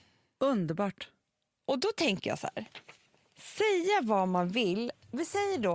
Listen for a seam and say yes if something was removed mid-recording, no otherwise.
no